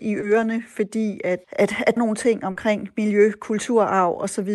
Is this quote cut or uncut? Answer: cut